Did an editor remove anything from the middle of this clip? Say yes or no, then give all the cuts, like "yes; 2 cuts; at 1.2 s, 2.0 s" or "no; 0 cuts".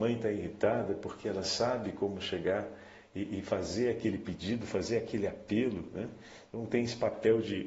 no; 0 cuts